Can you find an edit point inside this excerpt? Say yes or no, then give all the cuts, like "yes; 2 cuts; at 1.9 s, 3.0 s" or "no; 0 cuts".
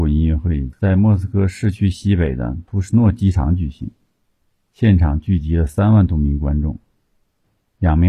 no; 0 cuts